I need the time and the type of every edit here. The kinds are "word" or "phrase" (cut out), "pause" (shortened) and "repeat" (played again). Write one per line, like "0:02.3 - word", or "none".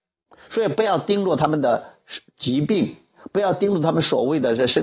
0:02.3 - pause